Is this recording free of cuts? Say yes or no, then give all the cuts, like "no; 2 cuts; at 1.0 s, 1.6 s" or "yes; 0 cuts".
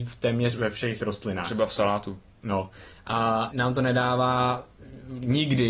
no; 2 cuts; at 1.0 s, 3.5 s